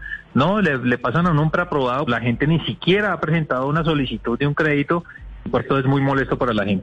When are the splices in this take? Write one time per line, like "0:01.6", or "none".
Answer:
0:02.1
0:05.6